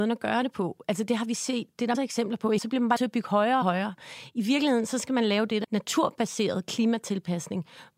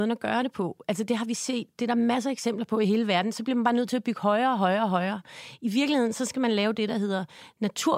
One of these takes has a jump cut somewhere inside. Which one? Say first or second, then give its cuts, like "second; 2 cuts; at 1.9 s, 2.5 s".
first; 5 cuts; at 1.9 s, 2.6 s, 3.0 s, 3.6 s, 5.6 s